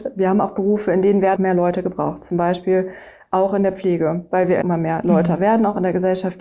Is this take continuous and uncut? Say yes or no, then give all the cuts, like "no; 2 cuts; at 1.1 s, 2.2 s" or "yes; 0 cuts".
no; 2 cuts; at 1.4 s, 4.6 s